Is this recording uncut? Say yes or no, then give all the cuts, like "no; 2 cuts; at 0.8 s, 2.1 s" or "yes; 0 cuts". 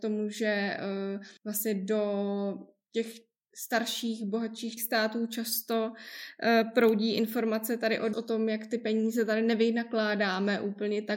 no; 3 cuts; at 1.4 s, 4.8 s, 8.1 s